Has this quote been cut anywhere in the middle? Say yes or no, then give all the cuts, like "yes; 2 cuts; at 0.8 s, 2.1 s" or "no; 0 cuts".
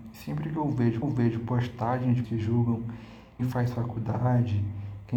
yes; 3 cuts; at 1.0 s, 2.2 s, 3.4 s